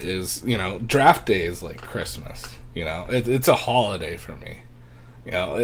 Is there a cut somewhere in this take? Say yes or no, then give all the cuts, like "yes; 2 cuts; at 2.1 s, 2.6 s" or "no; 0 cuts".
no; 0 cuts